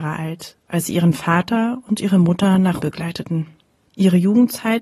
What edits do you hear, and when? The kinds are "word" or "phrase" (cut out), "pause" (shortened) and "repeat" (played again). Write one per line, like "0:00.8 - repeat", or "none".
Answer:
0:02.8 - word